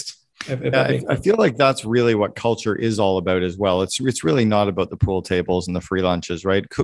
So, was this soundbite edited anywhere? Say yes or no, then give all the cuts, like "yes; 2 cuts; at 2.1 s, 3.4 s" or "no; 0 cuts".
no; 0 cuts